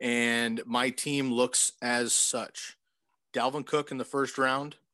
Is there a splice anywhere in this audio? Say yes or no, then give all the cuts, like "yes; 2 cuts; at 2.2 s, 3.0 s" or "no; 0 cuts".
no; 0 cuts